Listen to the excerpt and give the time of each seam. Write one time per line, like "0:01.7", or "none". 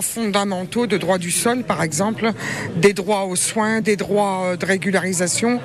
none